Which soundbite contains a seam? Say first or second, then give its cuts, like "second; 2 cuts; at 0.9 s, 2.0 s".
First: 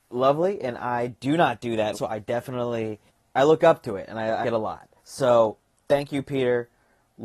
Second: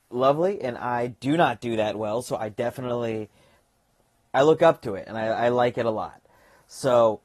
first; 4 cuts; at 1.9 s, 3.1 s, 4.4 s, 5.0 s